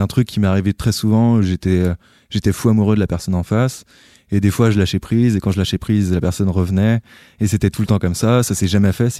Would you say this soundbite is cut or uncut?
uncut